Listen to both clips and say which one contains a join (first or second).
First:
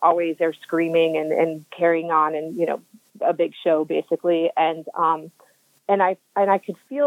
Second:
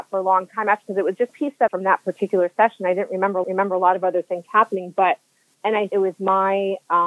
second